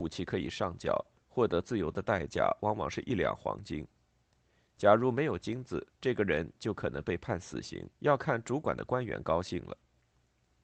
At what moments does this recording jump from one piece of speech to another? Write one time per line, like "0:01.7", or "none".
0:01.2
0:05.9
0:07.9